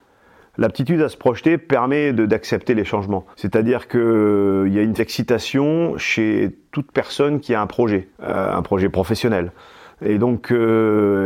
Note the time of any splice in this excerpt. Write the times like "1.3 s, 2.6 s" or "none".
3.3 s, 5.0 s, 8.1 s